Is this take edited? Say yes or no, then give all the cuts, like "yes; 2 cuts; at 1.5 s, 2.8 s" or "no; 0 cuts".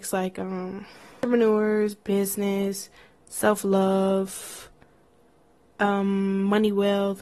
no; 0 cuts